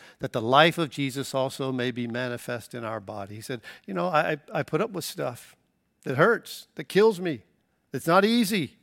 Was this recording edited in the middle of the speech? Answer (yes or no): no